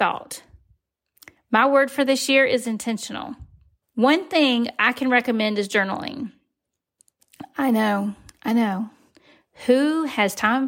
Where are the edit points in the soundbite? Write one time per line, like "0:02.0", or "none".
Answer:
0:03.8